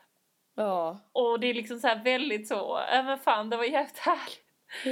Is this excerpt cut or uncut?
uncut